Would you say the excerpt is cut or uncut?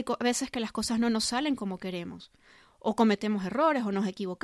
uncut